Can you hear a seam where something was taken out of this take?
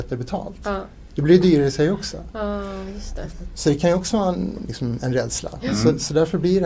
no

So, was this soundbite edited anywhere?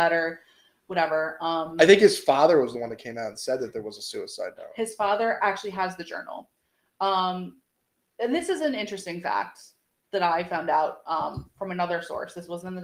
no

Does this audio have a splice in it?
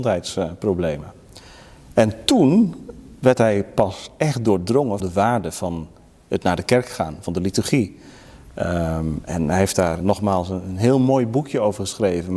yes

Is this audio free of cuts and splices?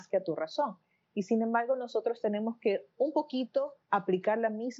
no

